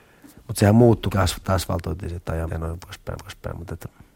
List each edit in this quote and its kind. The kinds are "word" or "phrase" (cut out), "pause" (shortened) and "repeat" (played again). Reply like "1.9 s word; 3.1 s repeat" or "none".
1.1 s word; 1.4 s word; 2.5 s word; 3.2 s repeat